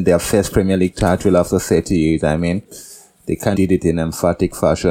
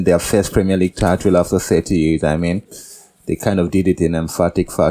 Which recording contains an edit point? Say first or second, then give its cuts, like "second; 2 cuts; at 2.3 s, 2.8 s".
first; 1 cut; at 3.5 s